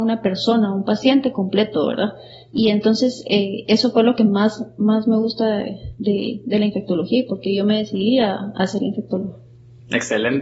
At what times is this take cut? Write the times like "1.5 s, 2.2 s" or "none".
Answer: none